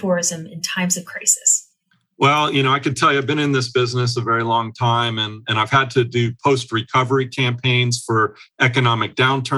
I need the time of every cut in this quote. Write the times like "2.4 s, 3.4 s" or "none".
none

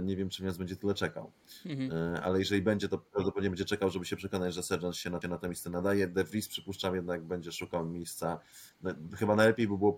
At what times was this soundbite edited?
5.2 s

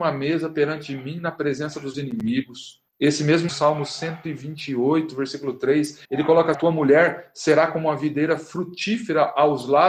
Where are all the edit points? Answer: 1.9 s, 2.9 s, 3.5 s, 6.0 s, 6.5 s

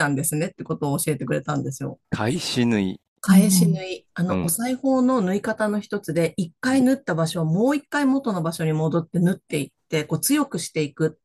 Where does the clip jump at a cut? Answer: 2.0 s

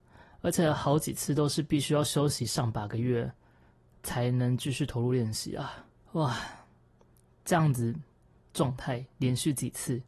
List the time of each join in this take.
6.0 s

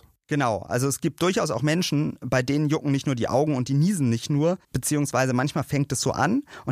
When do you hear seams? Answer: 4.6 s

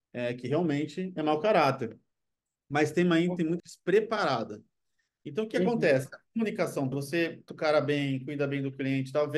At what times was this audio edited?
3.6 s, 6.9 s, 7.5 s

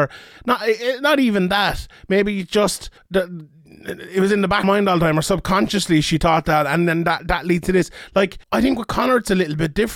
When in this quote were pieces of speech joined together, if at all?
3.0 s, 4.6 s, 8.4 s

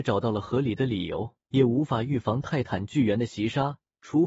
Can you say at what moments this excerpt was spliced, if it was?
1.5 s

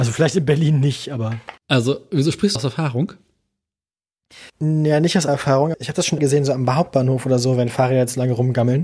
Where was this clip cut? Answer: 1.6 s, 2.6 s, 4.5 s, 5.3 s, 5.7 s, 6.2 s

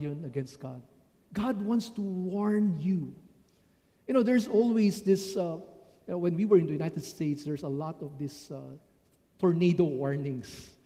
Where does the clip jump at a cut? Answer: none

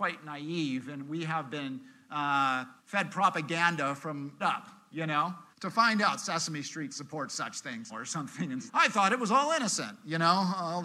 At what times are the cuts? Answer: 2.8 s, 4.4 s, 5.5 s, 7.9 s, 8.7 s

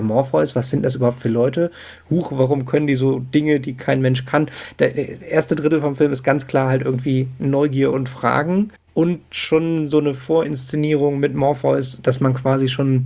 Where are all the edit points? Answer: 8.8 s

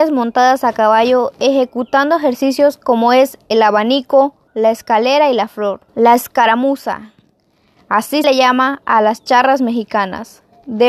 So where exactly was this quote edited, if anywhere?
4.5 s, 5.9 s, 8.2 s

